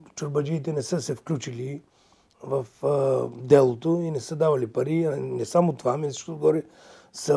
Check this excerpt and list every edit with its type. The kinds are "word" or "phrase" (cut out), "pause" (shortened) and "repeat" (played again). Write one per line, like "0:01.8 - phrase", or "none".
none